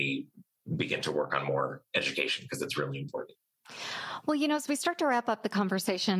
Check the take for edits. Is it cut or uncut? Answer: uncut